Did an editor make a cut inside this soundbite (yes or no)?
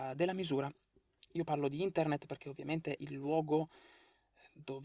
yes